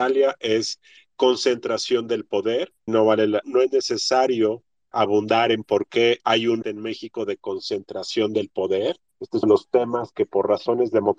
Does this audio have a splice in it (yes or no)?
yes